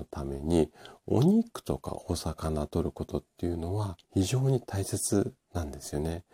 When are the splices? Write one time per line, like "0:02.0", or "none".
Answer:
0:04.0